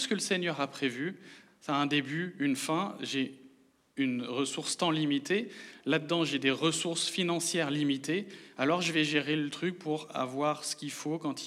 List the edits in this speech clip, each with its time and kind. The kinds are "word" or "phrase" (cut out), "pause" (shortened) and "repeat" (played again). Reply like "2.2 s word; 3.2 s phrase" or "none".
none